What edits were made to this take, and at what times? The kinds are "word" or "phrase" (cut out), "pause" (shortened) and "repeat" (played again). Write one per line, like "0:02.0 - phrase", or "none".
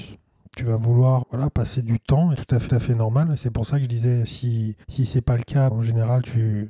0:01.2 - word
0:02.3 - phrase
0:02.7 - repeat
0:04.8 - pause
0:05.7 - word